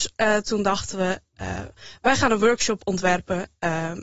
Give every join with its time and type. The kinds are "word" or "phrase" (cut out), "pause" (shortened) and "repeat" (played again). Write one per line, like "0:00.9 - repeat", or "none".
none